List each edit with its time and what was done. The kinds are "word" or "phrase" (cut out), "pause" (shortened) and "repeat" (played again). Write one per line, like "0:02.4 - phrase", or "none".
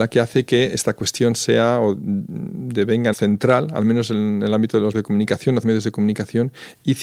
0:03.1 - word
0:04.9 - word
0:05.6 - word